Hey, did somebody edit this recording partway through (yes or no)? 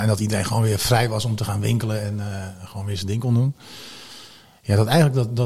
no